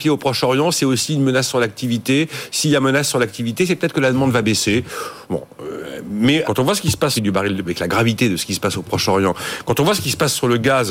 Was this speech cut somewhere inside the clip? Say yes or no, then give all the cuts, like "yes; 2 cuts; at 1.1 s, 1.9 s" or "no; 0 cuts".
yes; 3 cuts; at 6.4 s, 7.2 s, 7.6 s